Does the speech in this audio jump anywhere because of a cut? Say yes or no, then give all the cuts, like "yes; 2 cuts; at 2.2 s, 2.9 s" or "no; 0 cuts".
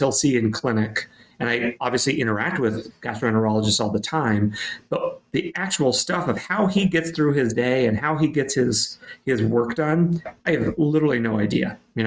no; 0 cuts